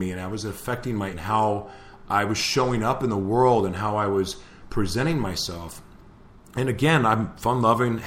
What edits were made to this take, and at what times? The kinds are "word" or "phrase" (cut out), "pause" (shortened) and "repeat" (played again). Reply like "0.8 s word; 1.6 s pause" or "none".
1.1 s word